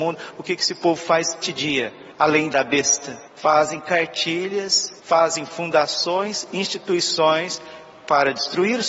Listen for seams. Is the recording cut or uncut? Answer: cut